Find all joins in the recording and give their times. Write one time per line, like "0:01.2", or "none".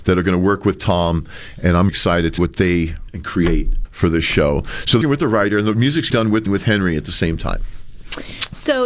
0:01.9
0:02.4
0:03.1
0:03.8
0:05.0
0:06.1
0:06.5